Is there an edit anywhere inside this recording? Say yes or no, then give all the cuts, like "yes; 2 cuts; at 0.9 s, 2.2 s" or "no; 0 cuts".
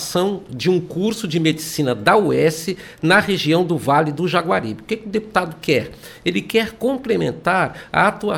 no; 0 cuts